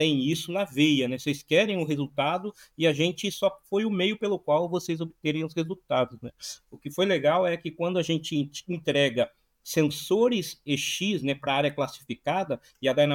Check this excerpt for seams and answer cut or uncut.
uncut